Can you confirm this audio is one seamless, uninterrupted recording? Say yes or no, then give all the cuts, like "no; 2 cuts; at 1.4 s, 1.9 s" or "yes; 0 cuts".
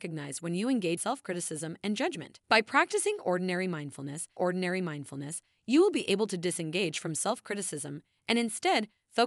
no; 3 cuts; at 1.0 s, 2.4 s, 4.4 s